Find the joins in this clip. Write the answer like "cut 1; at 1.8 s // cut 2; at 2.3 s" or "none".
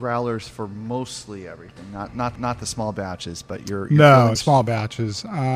cut 1; at 2.4 s // cut 2; at 4.4 s